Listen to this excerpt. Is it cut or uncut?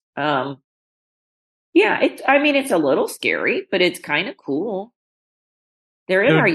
uncut